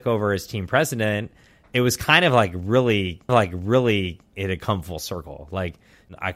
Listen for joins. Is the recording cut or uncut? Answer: cut